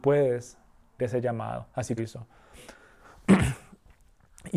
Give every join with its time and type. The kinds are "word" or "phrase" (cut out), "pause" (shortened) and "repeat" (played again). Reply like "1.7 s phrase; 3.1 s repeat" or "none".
1.0 s phrase; 2.0 s phrase; 2.9 s pause